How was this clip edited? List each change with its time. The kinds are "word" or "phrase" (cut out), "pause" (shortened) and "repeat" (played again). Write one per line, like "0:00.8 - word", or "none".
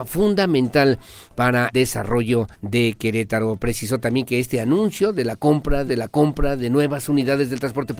0:01.7 - word
0:02.5 - pause
0:05.9 - repeat